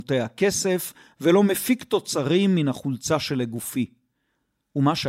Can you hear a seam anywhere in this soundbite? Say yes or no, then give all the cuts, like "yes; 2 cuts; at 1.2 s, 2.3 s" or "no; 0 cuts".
no; 0 cuts